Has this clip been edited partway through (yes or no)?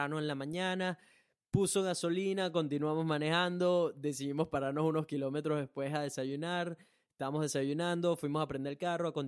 no